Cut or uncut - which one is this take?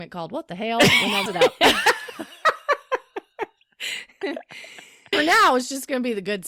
cut